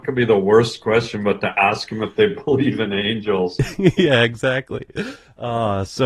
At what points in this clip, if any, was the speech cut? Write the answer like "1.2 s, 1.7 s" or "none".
none